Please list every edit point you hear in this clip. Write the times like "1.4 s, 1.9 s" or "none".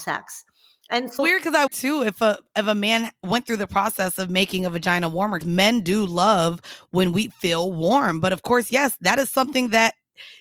1.2 s, 1.7 s, 5.4 s